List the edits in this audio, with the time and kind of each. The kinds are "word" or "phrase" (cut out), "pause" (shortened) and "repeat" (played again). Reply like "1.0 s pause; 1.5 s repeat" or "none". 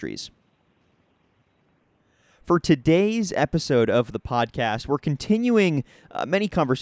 none